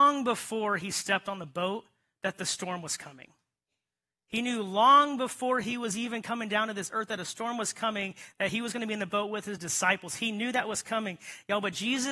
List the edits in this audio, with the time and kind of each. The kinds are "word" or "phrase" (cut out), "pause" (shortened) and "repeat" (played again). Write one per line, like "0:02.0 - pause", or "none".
none

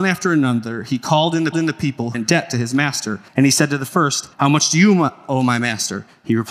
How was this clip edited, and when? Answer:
0:01.5 - repeat
0:02.1 - word
0:03.3 - pause
0:04.3 - pause

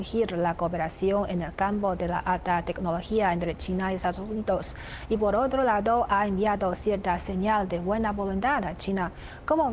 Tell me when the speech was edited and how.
none

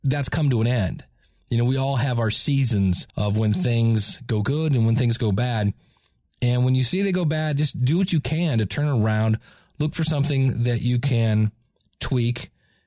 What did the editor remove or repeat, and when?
0:03.1 - pause

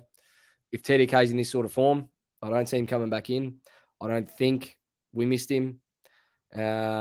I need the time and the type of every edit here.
none

